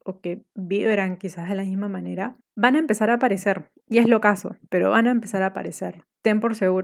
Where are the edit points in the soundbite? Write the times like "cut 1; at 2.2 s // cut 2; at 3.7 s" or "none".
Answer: none